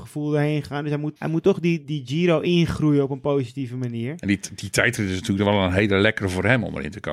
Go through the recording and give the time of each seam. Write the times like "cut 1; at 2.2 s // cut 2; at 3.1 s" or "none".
cut 1; at 1.2 s // cut 2; at 1.8 s